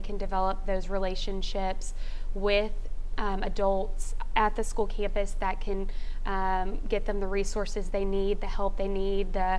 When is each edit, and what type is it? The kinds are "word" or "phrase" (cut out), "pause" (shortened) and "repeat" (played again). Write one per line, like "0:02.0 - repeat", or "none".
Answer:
none